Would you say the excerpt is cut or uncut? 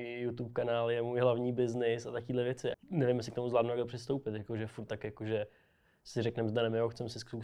cut